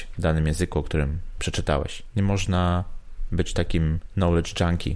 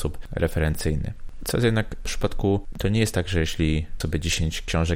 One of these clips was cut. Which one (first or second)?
second